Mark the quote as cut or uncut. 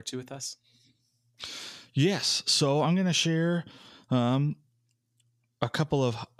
uncut